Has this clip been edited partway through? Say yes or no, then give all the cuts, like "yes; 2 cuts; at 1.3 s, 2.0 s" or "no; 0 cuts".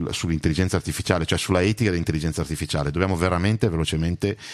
no; 0 cuts